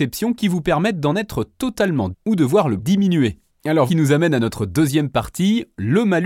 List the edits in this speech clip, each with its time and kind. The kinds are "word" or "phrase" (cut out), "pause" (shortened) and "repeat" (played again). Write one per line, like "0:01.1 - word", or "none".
0:02.1 - word
0:02.8 - word
0:03.9 - word